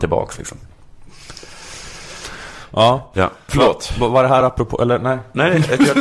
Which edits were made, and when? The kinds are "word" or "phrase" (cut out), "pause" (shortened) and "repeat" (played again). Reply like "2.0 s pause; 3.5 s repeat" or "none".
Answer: none